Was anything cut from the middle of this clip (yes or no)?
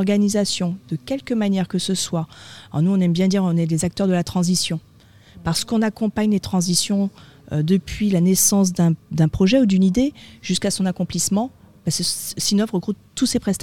no